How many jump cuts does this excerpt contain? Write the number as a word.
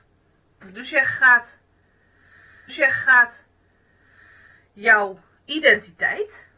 one